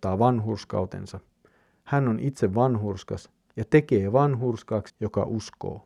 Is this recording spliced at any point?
yes; 1 cut; at 4.9 s

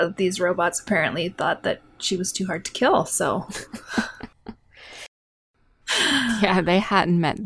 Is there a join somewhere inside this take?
no; 0 cuts

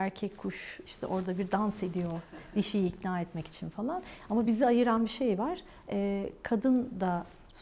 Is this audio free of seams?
yes; 0 cuts

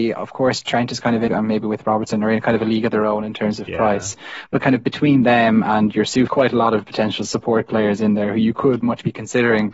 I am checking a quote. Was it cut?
yes; 4 cuts; at 1.3 s, 4.6 s, 6.3 s, 8.8 s

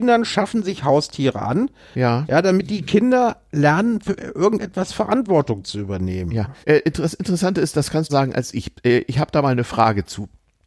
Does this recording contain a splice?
yes; 2 cuts; at 6.6 s, 8.1 s

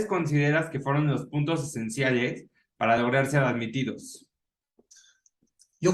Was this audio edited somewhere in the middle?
no; 0 cuts

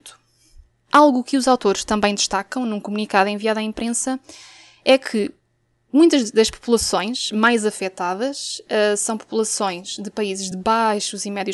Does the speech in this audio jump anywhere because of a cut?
no; 0 cuts

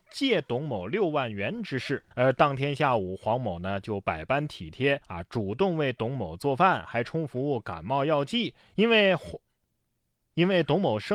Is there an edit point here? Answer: yes; 3 cuts; at 2.1 s, 5.0 s, 8.6 s

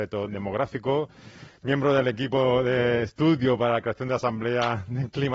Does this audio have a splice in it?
no; 0 cuts

